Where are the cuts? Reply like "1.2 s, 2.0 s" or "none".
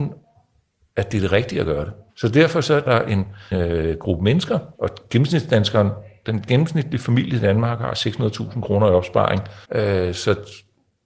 2.1 s, 2.9 s, 3.5 s, 4.7 s, 9.6 s